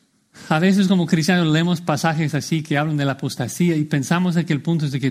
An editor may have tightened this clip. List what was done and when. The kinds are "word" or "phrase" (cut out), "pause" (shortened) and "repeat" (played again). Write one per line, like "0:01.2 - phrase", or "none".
none